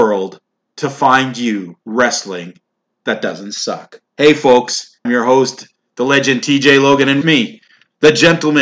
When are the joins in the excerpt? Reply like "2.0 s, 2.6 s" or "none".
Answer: 1.8 s, 4.1 s, 5.0 s, 7.2 s